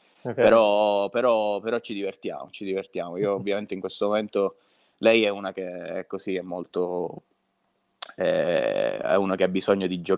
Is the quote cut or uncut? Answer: uncut